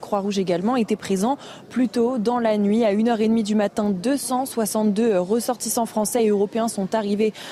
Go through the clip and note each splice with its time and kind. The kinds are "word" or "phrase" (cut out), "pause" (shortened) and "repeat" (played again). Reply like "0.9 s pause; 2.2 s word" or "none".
none